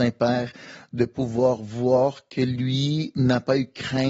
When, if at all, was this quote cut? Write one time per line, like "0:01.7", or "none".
none